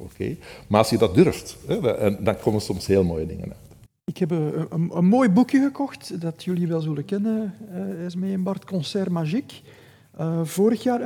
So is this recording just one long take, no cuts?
no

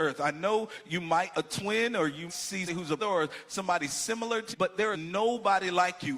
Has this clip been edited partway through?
yes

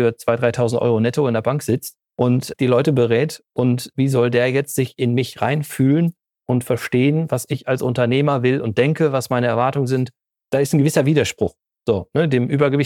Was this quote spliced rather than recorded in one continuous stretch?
no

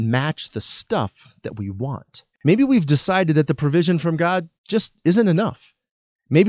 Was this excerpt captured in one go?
no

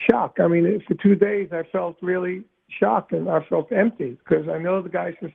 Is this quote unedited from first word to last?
yes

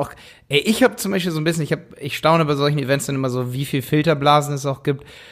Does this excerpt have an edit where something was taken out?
no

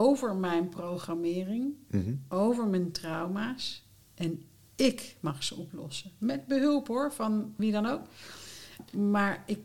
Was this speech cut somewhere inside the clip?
yes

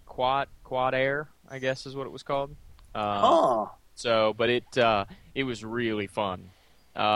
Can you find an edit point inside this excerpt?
no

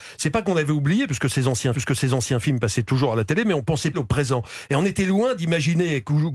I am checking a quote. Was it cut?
yes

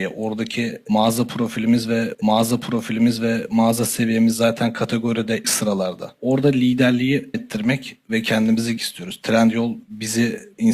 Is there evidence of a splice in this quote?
yes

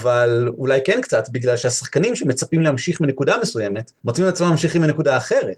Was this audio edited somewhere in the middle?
yes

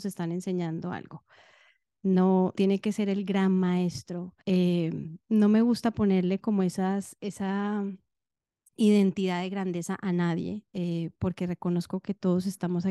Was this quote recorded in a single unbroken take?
no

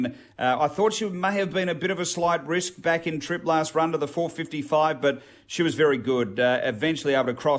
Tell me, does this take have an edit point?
no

